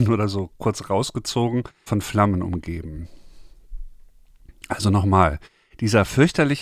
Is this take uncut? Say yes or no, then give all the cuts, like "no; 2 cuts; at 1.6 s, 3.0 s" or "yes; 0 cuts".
no; 1 cut; at 1.9 s